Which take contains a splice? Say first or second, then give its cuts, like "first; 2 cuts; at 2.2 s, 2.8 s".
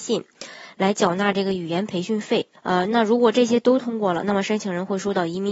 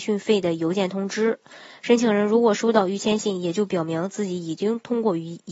first; 1 cut; at 2.6 s